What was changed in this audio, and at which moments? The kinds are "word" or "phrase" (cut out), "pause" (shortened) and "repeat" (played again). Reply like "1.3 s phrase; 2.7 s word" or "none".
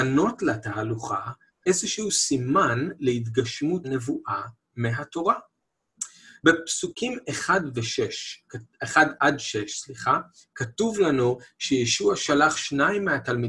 3.8 s word